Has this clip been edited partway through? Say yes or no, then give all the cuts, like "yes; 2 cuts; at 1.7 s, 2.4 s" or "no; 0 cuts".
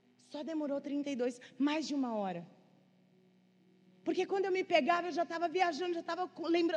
no; 0 cuts